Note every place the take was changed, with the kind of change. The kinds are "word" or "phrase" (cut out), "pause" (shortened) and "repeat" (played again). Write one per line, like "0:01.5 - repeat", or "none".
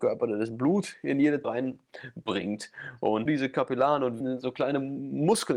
0:01.4 - word
0:03.3 - word
0:04.2 - word